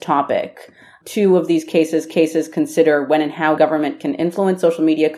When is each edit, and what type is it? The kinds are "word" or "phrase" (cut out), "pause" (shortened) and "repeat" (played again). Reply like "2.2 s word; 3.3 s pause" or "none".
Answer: 2.1 s repeat; 3.6 s word